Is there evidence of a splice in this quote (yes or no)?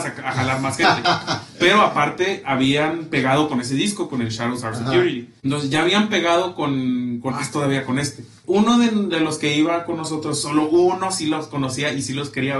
yes